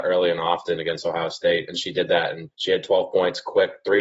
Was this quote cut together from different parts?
yes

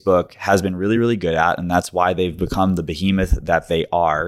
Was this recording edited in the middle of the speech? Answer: no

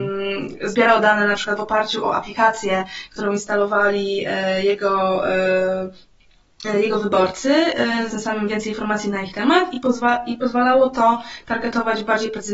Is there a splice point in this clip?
yes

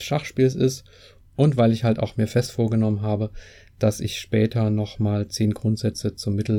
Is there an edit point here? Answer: no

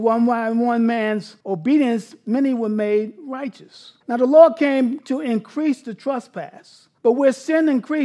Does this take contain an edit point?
yes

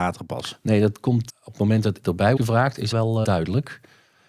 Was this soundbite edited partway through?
yes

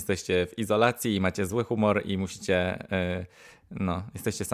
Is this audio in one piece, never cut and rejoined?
yes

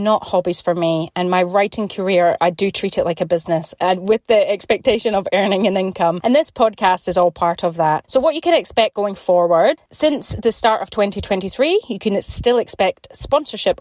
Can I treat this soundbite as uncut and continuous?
yes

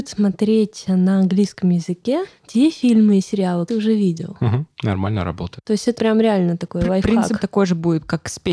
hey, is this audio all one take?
no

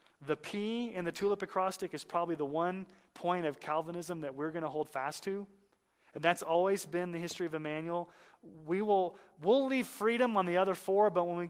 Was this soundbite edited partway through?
no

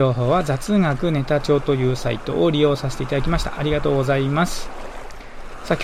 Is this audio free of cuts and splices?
yes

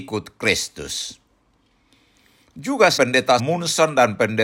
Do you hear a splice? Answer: yes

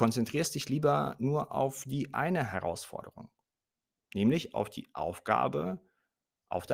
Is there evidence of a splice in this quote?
no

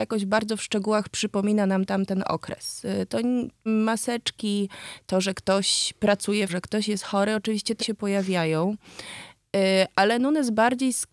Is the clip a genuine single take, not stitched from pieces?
no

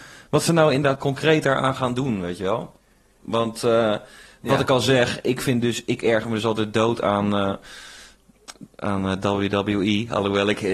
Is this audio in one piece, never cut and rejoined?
yes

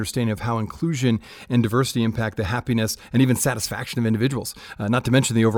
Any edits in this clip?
no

